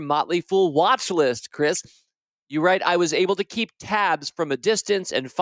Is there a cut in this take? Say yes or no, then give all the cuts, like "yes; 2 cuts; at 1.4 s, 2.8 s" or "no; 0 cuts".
no; 0 cuts